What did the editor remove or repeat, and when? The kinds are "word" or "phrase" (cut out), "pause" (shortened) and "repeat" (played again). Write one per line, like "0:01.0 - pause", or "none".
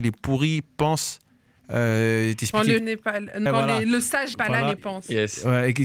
0:02.8 - word
0:03.5 - word
0:04.3 - word
0:04.8 - word

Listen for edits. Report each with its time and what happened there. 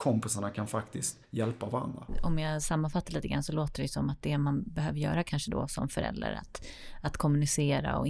0:01.2 - pause

